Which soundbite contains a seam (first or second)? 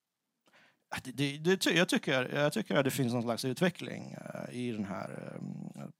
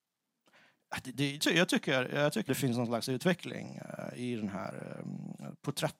second